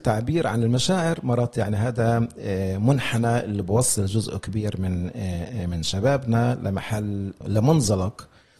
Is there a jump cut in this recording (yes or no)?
no